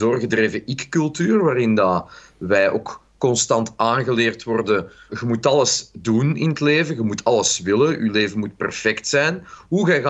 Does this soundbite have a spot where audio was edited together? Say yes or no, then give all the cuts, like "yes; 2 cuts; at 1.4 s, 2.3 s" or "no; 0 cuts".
yes; 1 cut; at 5.1 s